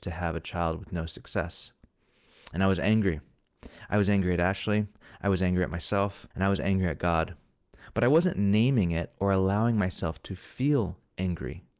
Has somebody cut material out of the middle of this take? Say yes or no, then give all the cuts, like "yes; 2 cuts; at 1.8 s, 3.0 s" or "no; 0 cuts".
yes; 1 cut; at 6.3 s